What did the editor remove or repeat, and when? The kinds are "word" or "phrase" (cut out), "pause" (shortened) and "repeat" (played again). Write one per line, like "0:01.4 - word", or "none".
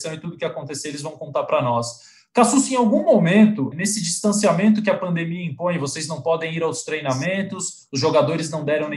none

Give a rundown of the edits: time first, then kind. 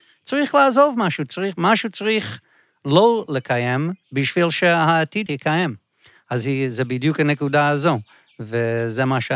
0:04.0 - pause
0:05.3 - word

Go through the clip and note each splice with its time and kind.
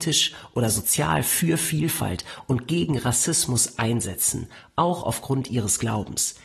none

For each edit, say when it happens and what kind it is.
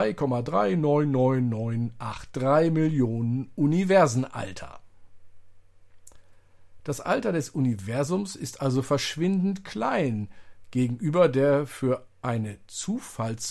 none

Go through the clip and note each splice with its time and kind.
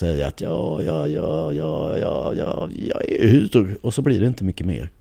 none

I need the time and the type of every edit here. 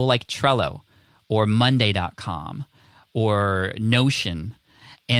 none

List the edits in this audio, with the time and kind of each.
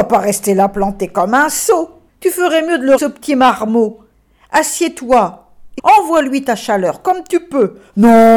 0:02.1 - pause
0:03.0 - word
0:05.8 - phrase

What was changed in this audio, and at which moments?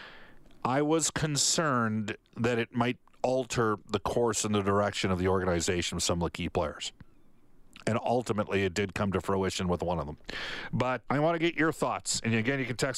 0:11.1 - word

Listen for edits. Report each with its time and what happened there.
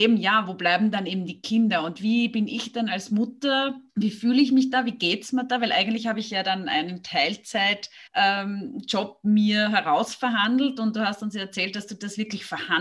0:03.9 - pause
0:08.1 - pause

